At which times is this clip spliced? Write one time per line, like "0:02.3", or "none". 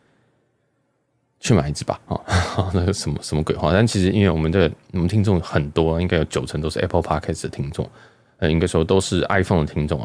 none